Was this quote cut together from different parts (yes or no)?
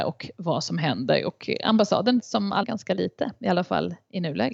yes